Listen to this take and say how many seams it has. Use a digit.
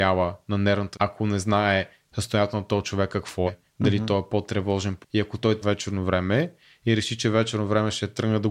4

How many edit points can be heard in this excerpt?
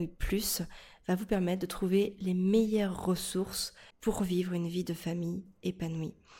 1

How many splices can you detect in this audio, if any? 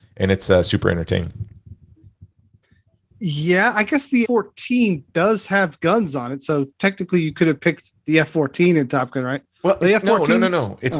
1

